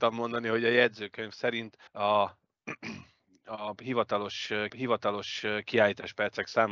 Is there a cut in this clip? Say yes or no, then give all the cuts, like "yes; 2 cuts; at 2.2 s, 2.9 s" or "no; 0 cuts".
yes; 2 cuts; at 1.9 s, 4.7 s